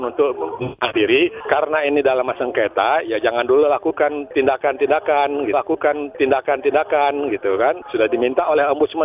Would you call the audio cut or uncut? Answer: cut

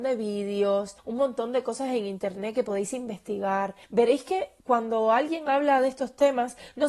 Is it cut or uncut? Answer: cut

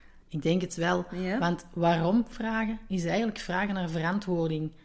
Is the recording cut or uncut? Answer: uncut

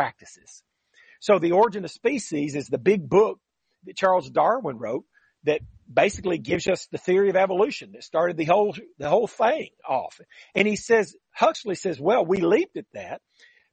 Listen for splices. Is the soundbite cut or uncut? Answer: uncut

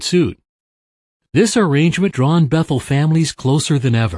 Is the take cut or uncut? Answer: cut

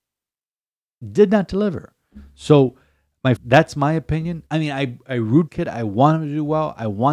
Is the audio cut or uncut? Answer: cut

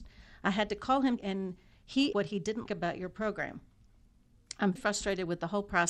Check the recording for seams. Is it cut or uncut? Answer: cut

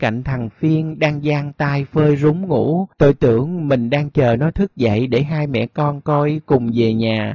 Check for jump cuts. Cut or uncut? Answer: cut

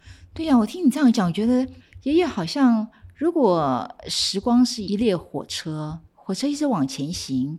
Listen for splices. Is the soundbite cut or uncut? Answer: cut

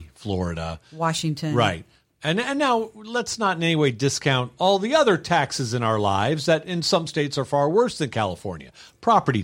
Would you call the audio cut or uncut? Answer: uncut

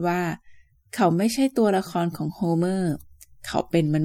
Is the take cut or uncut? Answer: uncut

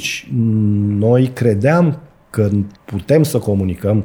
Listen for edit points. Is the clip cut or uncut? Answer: cut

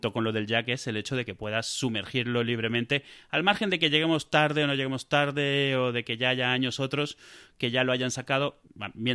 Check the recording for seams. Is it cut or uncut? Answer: uncut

